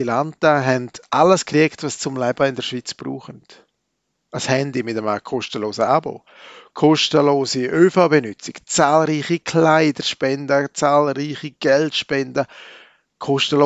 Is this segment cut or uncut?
uncut